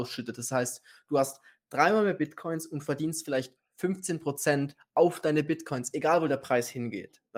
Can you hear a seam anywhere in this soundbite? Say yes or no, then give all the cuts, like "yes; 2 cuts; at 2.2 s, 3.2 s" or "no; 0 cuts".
no; 0 cuts